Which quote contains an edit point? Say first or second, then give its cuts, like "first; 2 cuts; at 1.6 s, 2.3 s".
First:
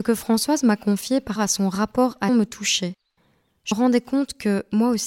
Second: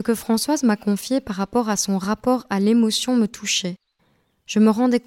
first; 3 cuts; at 1.4 s, 2.3 s, 3.7 s